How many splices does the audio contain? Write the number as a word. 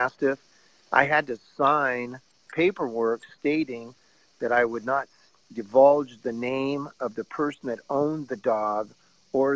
zero